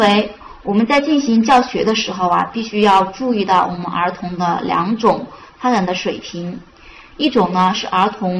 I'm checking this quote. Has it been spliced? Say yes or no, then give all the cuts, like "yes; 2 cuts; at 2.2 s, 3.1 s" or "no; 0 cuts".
no; 0 cuts